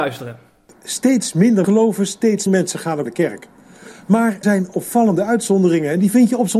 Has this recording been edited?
yes; 4 cuts; at 1.6 s, 2.5 s, 3.1 s, 4.4 s

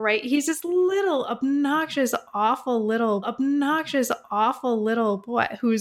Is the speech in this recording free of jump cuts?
no; 1 cut; at 3.2 s

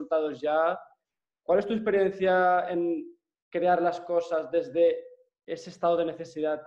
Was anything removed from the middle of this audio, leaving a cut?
no; 0 cuts

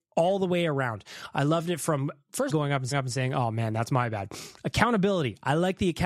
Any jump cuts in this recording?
yes; 2 cuts; at 2.5 s, 2.9 s

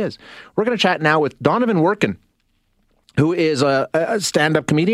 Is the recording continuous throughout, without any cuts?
yes; 0 cuts

